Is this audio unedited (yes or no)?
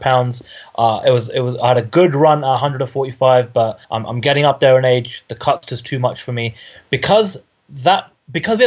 no